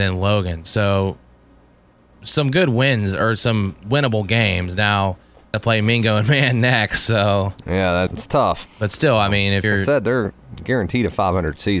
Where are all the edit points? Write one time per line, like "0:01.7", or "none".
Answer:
0:05.5
0:07.6
0:08.1
0:08.7
0:09.6

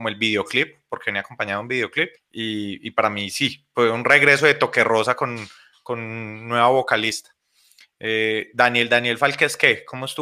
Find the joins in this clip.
0:02.2

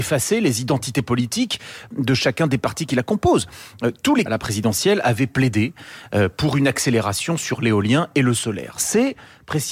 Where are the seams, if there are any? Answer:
0:04.3

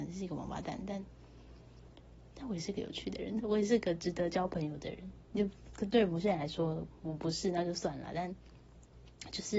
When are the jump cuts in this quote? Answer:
0:03.4

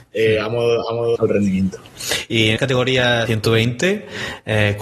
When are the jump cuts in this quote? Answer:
0:01.2
0:02.6
0:03.3

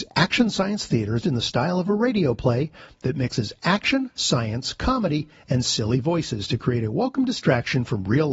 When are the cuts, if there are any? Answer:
0:01.2

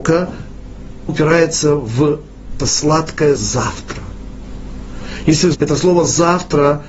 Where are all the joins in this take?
0:01.1
0:02.6
0:03.4
0:05.5

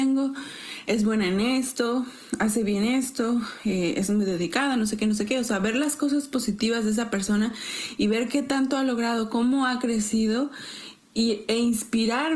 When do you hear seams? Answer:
none

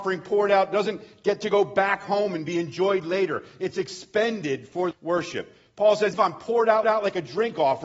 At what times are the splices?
0:04.9
0:06.1
0:06.8

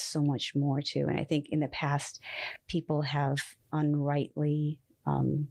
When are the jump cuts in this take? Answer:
0:03.7

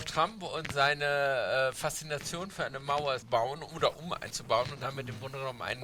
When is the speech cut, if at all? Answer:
0:03.2
0:04.3

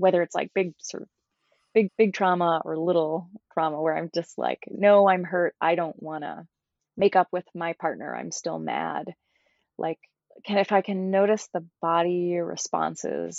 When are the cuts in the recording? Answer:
0:01.9

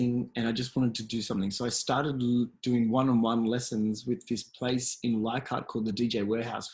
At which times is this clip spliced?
none

